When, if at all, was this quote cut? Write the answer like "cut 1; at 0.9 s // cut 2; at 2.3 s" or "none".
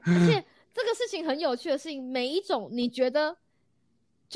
none